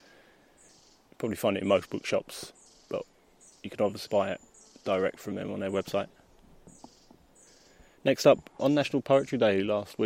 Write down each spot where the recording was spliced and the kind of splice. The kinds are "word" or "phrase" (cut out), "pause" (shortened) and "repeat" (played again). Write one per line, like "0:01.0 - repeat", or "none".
0:04.1 - word
0:08.6 - word